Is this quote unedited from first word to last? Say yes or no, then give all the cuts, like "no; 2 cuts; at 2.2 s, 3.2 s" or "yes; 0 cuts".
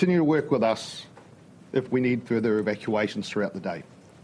yes; 0 cuts